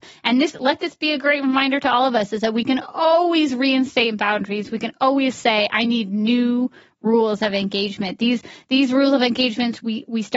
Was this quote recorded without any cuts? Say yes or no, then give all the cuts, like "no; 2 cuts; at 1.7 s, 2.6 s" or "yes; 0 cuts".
yes; 0 cuts